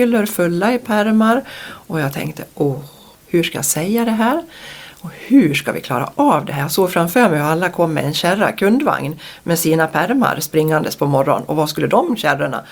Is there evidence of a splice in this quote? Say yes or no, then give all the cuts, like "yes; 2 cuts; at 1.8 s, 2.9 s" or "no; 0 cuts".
no; 0 cuts